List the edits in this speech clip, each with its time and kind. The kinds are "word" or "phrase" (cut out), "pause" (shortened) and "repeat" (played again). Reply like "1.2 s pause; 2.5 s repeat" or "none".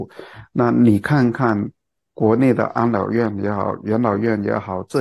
none